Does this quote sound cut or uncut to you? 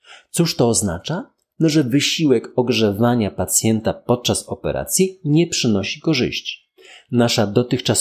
uncut